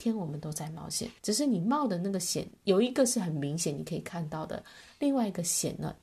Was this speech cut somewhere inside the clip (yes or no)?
yes